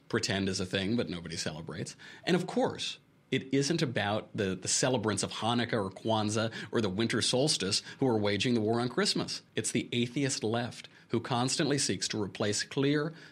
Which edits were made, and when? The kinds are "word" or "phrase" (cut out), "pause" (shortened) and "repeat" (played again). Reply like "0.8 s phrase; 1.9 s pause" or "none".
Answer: 9.5 s pause